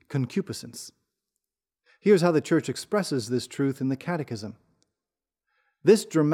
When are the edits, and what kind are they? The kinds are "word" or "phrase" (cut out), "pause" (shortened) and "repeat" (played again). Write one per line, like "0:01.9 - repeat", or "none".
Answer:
none

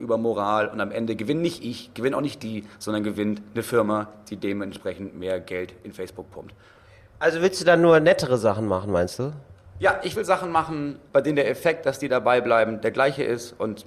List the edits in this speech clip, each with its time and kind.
none

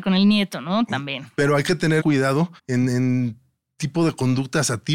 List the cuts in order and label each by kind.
0:02.0 - phrase
0:02.6 - pause

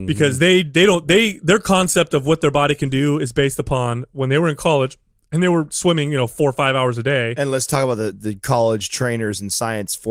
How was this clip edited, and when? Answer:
0:08.1 - word

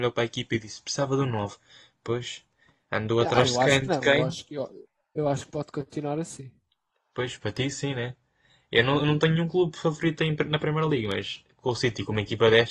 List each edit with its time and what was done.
none

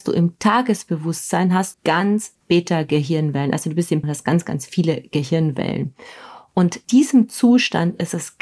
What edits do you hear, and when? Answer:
0:01.7 - word
0:02.4 - word
0:04.0 - word
0:06.8 - word

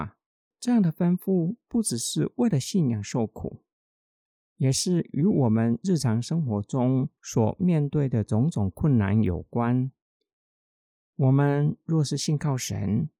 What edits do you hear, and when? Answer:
none

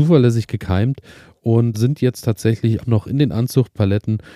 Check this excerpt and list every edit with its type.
0:01.7 - word
0:02.8 - word

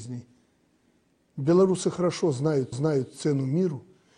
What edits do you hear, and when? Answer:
0:02.7 - repeat

